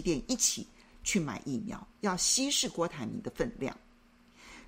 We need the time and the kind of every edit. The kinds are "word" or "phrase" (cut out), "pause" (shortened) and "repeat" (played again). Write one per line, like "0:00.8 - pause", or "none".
0:01.9 - pause